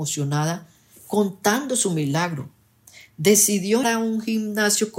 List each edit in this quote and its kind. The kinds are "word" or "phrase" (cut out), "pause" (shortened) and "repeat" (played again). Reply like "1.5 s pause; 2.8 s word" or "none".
3.8 s word